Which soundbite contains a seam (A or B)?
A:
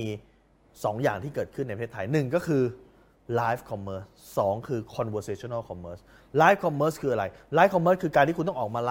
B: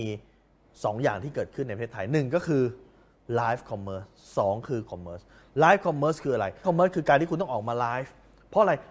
B